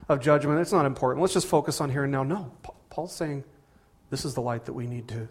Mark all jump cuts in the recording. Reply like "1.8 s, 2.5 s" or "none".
none